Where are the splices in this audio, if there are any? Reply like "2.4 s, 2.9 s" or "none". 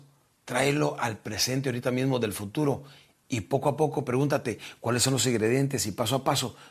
none